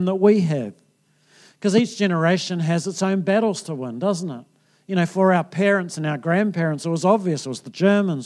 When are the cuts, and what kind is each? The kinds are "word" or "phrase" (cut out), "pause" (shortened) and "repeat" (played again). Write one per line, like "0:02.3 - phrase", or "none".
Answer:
none